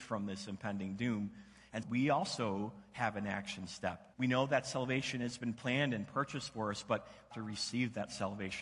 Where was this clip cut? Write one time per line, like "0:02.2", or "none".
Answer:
0:01.8
0:04.1
0:07.3